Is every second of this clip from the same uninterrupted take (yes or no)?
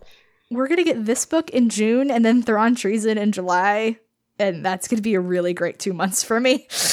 yes